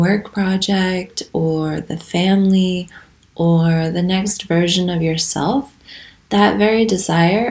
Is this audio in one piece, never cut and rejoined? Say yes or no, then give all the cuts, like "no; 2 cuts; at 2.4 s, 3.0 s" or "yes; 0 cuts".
yes; 0 cuts